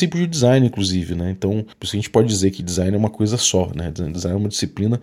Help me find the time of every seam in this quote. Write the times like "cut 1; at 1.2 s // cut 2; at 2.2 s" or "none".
cut 1; at 1.7 s